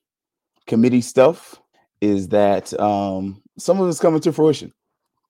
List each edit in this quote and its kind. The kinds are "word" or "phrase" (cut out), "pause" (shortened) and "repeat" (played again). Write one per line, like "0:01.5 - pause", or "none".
0:01.7 - pause
0:03.5 - pause